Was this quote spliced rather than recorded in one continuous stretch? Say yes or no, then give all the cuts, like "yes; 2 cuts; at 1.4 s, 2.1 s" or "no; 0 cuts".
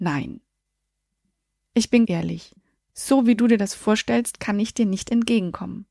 yes; 1 cut; at 2.0 s